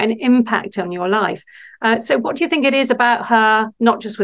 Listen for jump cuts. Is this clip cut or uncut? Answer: uncut